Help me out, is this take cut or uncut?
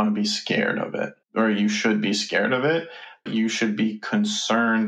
cut